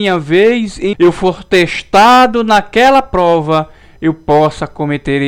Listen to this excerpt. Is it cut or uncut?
cut